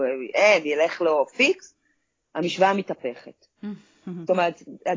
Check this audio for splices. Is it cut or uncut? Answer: uncut